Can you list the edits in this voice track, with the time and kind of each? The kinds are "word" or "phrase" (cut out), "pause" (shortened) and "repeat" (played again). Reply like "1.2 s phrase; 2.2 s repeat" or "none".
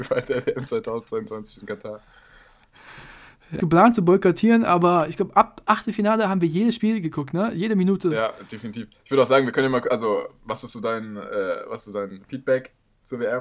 3.6 s phrase